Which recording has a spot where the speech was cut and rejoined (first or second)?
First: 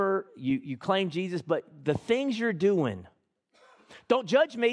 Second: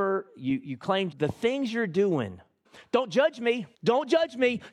second